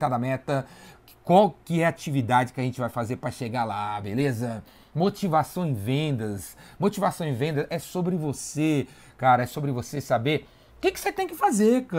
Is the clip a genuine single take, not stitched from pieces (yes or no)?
yes